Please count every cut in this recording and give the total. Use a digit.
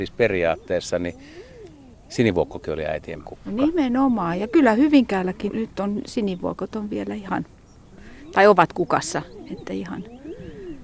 2